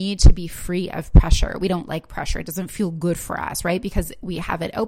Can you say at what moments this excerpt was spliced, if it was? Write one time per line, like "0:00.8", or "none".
none